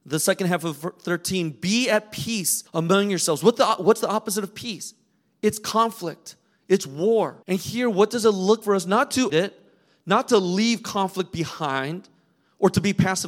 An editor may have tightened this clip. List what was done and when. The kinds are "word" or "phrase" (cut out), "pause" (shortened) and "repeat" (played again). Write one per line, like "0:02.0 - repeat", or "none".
0:02.7 - pause
0:07.4 - pause
0:08.6 - word
0:09.3 - word